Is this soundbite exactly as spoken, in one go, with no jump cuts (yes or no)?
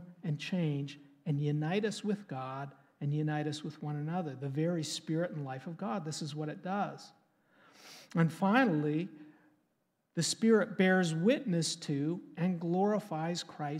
yes